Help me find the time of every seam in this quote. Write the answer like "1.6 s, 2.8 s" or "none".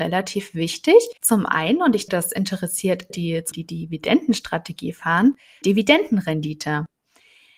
1.2 s, 2.1 s, 3.1 s, 3.5 s, 5.6 s